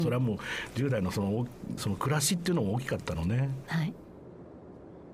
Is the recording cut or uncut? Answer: cut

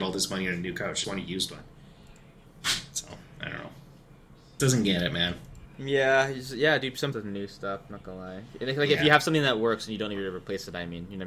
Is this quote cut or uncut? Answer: cut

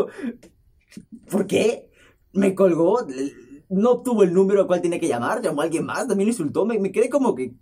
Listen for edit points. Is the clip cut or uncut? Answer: uncut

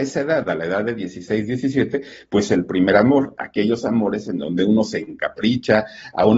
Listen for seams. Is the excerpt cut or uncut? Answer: uncut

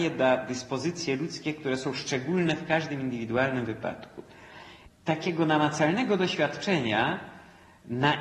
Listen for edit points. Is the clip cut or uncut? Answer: uncut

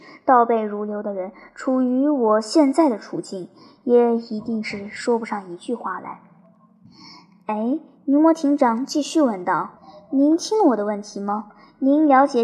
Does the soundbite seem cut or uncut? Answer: cut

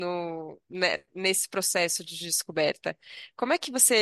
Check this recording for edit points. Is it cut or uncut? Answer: cut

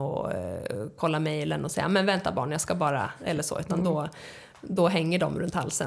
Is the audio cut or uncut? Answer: uncut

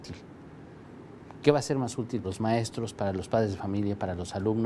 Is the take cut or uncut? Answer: cut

